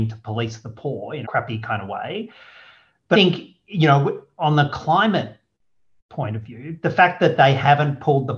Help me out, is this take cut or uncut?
cut